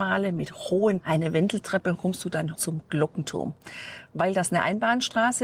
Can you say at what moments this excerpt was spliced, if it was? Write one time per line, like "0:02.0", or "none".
0:01.0
0:01.9
0:02.5